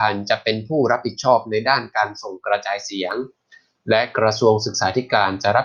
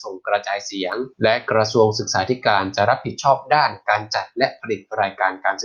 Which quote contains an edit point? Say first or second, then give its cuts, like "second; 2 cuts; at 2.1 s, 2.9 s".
second; 1 cut; at 1.1 s